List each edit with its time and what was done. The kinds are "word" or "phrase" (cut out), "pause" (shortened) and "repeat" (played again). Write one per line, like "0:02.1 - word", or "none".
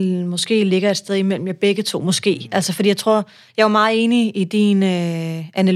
none